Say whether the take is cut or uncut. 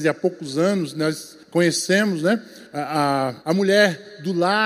cut